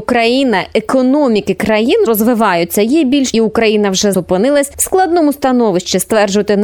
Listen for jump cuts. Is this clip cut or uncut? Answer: cut